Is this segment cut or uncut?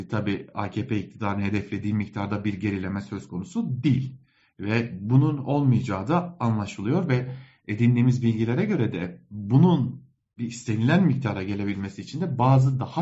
uncut